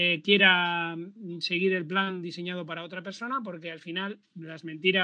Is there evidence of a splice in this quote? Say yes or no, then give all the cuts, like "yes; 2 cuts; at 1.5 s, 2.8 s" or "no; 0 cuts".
no; 0 cuts